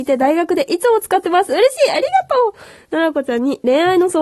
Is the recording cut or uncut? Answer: uncut